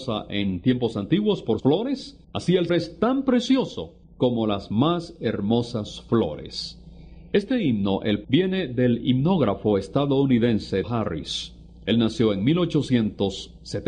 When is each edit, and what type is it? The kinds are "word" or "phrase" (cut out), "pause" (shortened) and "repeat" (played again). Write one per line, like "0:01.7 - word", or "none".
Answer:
0:01.6 - word
0:02.2 - pause
0:02.7 - word
0:04.0 - pause
0:08.2 - phrase
0:10.8 - word